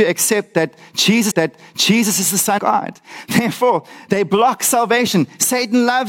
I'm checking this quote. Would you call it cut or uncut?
cut